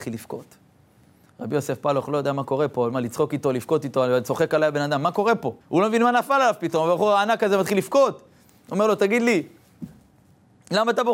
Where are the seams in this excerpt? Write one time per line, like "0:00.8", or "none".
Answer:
0:05.6

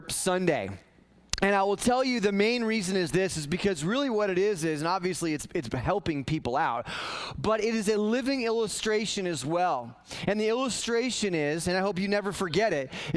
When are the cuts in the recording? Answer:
none

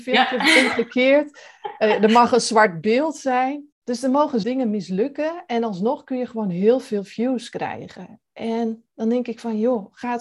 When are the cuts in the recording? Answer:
0:03.7
0:04.4

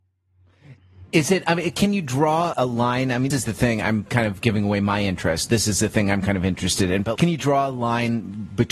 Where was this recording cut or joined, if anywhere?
0:02.5
0:03.3
0:07.1

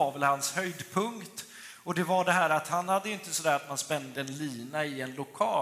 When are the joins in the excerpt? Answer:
none

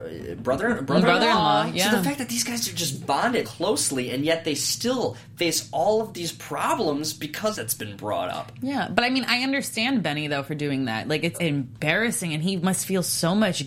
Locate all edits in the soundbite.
0:03.4
0:07.5
0:11.3

